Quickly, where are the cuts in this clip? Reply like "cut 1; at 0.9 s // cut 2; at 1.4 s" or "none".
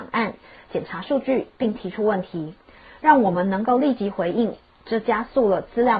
none